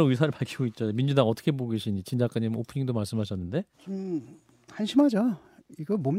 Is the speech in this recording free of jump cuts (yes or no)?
no